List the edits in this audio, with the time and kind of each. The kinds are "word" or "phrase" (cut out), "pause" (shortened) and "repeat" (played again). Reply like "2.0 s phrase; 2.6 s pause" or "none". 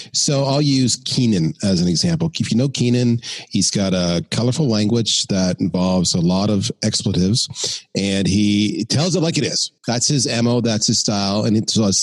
9.8 s pause